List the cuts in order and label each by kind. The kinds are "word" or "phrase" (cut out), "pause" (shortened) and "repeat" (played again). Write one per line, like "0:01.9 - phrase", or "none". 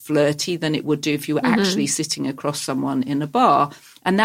none